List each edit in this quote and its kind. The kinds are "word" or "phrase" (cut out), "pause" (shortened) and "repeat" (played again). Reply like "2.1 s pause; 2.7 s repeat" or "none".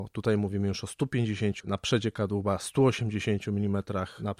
1.6 s word